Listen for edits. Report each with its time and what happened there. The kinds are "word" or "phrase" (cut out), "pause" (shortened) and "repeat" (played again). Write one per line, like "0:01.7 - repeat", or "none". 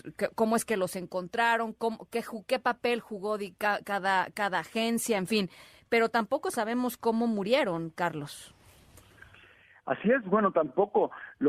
none